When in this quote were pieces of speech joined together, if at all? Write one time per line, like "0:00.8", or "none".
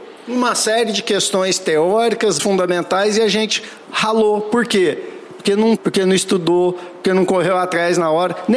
0:02.4
0:05.8